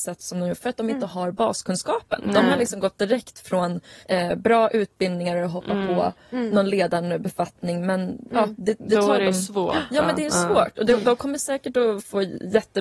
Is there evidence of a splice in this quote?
yes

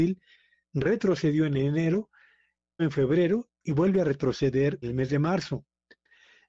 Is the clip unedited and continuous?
no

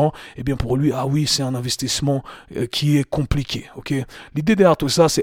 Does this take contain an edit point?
no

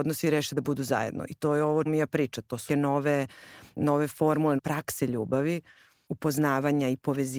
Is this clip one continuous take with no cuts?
no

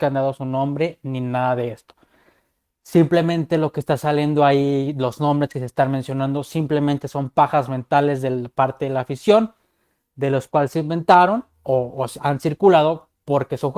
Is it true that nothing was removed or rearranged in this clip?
yes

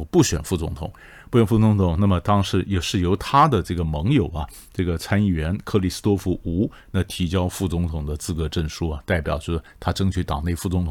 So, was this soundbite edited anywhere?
no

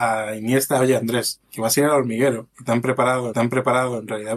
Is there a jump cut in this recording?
yes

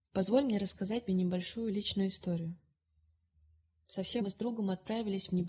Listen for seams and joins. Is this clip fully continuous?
no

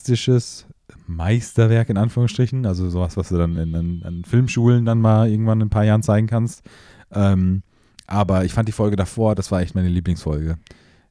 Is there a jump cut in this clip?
no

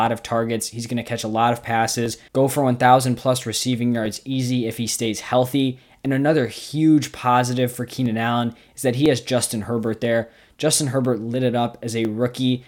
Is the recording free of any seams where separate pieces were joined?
yes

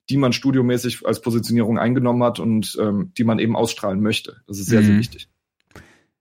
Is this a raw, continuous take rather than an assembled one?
yes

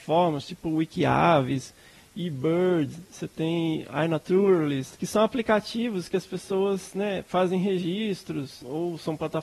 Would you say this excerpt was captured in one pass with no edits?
yes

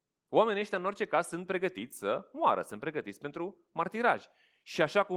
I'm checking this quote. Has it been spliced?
no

